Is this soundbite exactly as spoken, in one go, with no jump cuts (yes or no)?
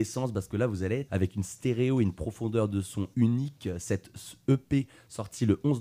no